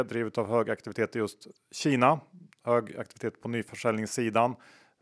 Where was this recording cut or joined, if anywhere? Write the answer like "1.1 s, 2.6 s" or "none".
none

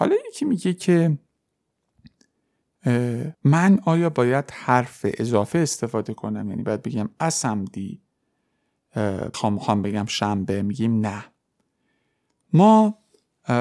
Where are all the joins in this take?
3.3 s, 9.3 s

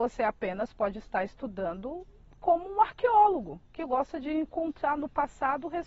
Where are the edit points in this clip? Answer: 3.7 s

